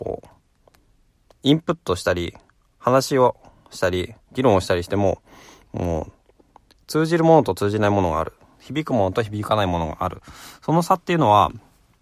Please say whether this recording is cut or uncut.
uncut